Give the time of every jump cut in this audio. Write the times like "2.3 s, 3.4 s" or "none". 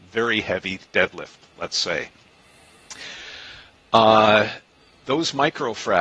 none

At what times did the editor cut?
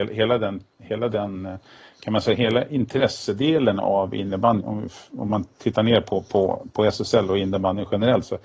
4.6 s

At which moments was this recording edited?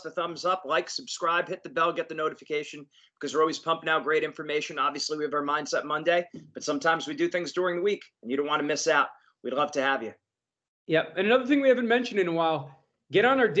none

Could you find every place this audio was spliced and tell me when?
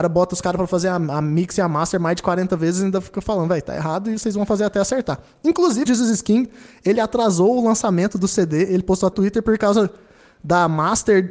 5.9 s, 9.1 s

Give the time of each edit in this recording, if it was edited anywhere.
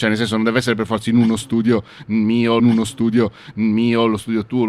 2.6 s

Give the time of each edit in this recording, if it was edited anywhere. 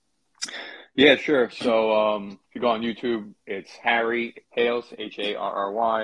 2.4 s, 3.4 s, 4.4 s

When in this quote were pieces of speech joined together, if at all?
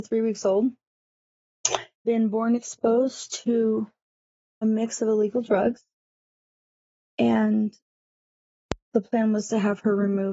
2.0 s, 4.6 s

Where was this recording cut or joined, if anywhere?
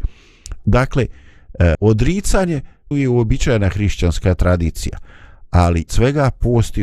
1.7 s, 2.9 s, 5.9 s

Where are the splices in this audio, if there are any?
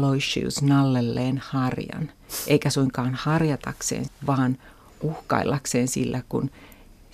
4.1 s

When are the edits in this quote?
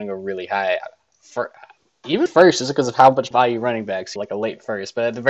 2.3 s, 3.3 s, 4.2 s

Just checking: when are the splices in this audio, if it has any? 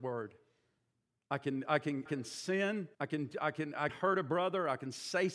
2.1 s, 2.9 s, 3.9 s

